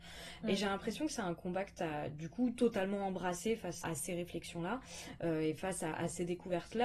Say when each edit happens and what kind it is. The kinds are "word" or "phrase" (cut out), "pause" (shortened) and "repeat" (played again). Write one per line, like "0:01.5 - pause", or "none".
0:03.8 - word